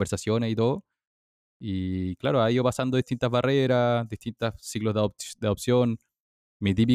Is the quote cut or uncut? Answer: uncut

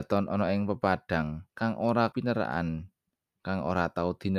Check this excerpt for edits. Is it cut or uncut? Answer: cut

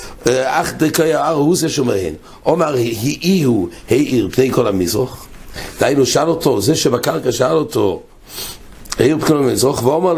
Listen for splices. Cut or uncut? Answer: uncut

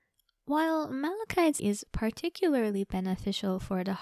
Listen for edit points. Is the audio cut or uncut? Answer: cut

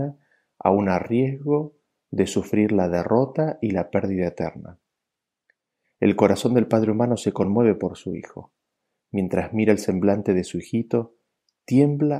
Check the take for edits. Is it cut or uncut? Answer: uncut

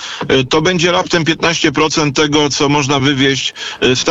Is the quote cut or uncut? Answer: uncut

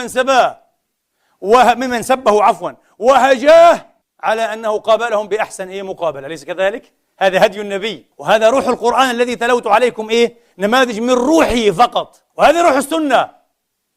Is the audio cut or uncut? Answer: cut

